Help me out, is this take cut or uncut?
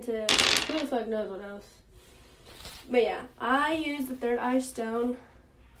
uncut